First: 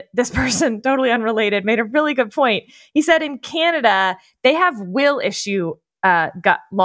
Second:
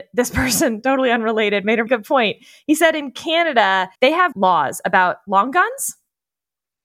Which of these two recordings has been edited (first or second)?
second